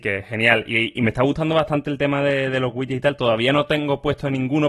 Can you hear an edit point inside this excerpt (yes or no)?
no